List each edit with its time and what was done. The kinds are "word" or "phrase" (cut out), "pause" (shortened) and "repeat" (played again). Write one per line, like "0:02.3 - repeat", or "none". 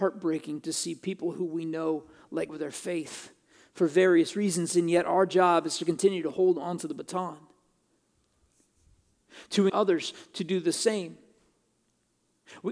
0:02.5 - word
0:09.7 - word

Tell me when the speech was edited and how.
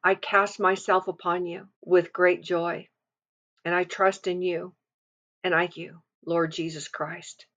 0:01.7 - pause
0:05.7 - word
0:06.1 - pause

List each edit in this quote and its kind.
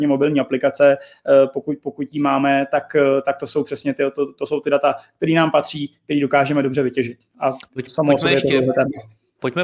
none

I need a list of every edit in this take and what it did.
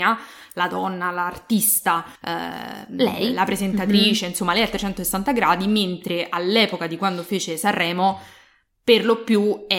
0:02.1 - pause

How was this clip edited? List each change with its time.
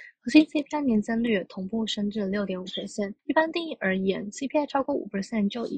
0:03.2 - pause

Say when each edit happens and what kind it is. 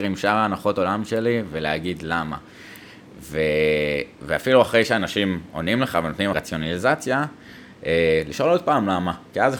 0:06.3 - phrase

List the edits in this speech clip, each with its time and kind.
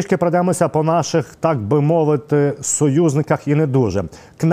none

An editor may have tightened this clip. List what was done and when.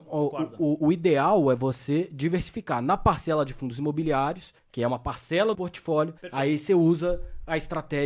0:04.6 - pause
0:05.5 - phrase
0:06.2 - pause

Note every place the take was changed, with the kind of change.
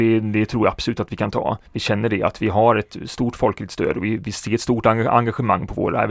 0:01.7 - pause

